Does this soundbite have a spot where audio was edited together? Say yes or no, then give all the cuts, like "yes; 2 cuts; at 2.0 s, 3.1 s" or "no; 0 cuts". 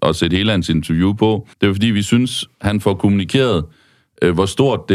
yes; 1 cut; at 1.5 s